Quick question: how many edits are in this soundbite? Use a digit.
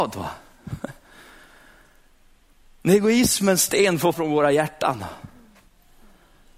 1